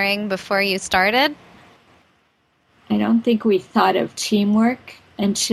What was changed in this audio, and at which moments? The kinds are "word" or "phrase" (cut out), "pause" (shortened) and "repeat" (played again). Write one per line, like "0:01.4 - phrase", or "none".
none